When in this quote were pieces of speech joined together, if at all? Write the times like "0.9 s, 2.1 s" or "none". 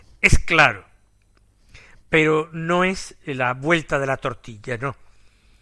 none

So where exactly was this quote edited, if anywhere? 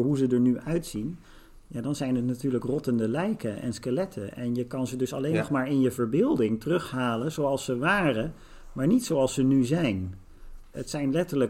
none

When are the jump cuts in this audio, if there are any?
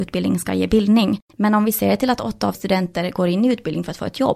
1.3 s, 2.5 s

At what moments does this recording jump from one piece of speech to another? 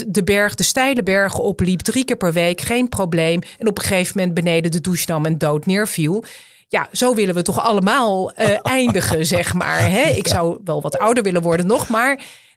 none

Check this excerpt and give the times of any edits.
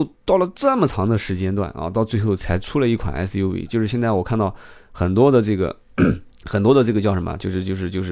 6.3 s

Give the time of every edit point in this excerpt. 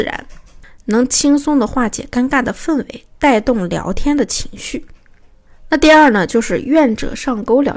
none

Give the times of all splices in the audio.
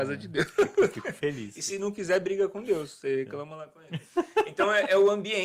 none

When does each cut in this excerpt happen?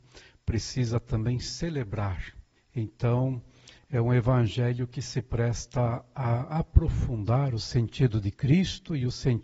2.5 s

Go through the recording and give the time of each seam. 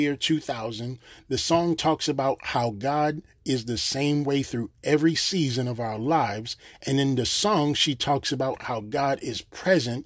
none

